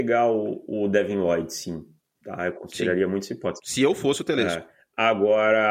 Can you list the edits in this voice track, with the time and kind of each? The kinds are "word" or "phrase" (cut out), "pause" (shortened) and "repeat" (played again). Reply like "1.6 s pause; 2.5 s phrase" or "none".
none